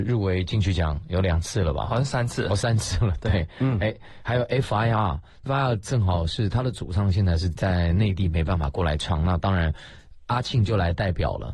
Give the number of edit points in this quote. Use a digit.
1